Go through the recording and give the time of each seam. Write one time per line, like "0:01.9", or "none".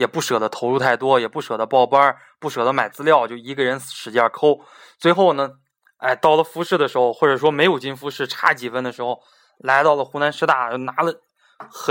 none